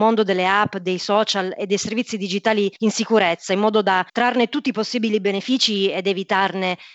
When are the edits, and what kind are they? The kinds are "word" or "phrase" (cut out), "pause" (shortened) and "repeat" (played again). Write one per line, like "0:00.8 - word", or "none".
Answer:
0:02.8 - pause
0:04.1 - pause